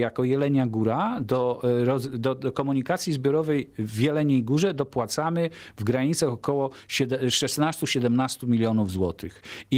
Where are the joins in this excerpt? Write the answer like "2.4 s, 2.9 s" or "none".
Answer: none